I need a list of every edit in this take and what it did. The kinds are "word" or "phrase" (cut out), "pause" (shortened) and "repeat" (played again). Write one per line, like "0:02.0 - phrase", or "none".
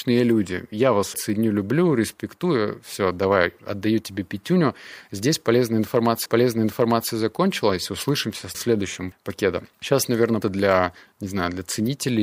0:01.1 - word
0:06.3 - repeat
0:08.5 - word
0:09.1 - word
0:09.7 - pause
0:10.4 - word